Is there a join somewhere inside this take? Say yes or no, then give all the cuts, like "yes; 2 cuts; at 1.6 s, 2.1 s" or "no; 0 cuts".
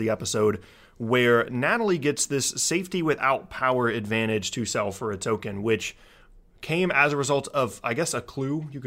no; 0 cuts